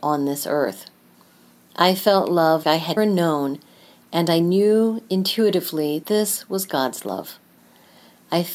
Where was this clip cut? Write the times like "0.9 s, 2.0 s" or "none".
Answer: 2.6 s, 3.0 s, 6.0 s